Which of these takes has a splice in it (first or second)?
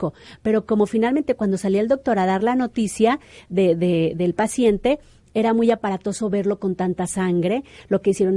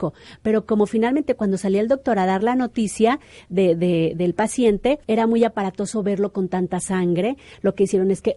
second